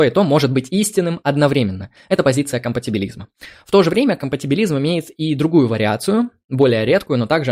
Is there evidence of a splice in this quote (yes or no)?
no